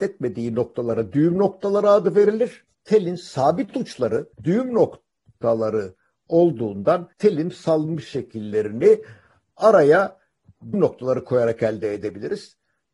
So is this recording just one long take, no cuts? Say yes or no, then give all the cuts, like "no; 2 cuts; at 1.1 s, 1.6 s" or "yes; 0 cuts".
no; 4 cuts; at 2.7 s, 4.3 s, 7.1 s, 10.7 s